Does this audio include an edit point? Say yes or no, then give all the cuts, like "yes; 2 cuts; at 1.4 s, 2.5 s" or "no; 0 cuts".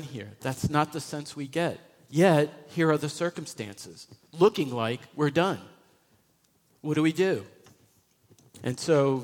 no; 0 cuts